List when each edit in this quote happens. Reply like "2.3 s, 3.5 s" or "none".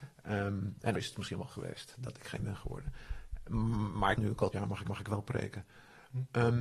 0.9 s, 1.5 s, 2.4 s, 4.1 s, 4.5 s, 4.8 s